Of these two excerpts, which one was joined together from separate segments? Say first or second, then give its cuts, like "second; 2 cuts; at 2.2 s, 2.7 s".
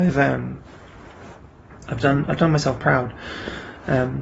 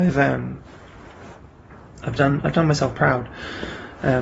first; 1 cut; at 1.8 s